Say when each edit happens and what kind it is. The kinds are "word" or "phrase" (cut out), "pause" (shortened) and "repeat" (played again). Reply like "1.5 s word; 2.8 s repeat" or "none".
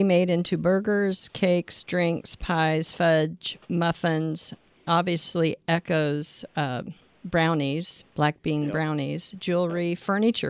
none